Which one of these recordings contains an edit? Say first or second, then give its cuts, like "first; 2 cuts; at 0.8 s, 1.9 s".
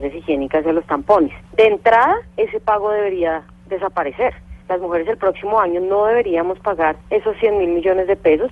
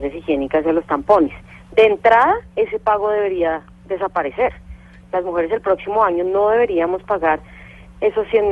first; 3 cuts; at 1.5 s, 4.6 s, 7.0 s